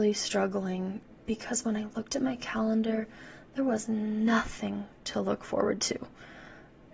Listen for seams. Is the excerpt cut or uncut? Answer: uncut